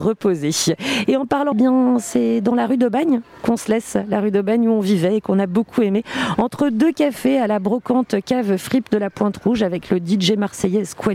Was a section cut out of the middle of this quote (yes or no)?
yes